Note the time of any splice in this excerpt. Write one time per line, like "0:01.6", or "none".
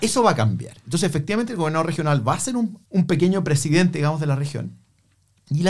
none